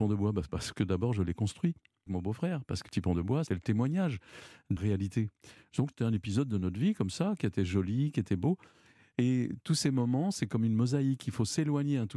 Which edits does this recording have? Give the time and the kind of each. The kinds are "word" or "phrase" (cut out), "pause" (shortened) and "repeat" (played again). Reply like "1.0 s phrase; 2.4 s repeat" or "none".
2.1 s word; 2.9 s word; 3.5 s word; 4.8 s word